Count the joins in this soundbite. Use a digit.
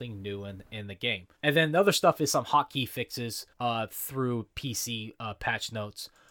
2